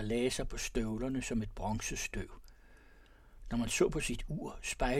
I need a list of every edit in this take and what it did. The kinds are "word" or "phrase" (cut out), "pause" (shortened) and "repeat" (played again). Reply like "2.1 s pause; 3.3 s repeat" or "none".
none